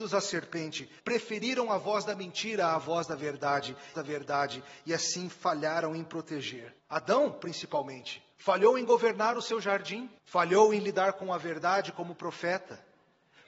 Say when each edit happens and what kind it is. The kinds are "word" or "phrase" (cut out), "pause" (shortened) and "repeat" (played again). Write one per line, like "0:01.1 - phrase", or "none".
0:01.0 - pause
0:03.9 - repeat
0:06.8 - pause
0:08.3 - pause
0:10.2 - pause